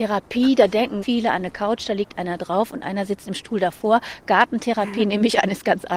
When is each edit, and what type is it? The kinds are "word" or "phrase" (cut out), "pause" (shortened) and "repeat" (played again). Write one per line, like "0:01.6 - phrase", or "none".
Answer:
0:01.0 - word